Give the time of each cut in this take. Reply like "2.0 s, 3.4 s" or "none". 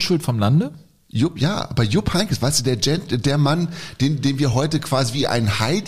none